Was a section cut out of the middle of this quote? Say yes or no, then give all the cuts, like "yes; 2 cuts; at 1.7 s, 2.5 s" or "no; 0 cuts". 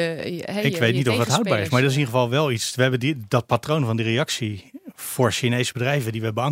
no; 0 cuts